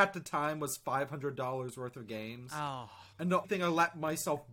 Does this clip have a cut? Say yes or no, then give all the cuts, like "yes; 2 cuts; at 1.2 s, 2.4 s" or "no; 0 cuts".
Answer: yes; 2 cuts; at 3.1 s, 3.4 s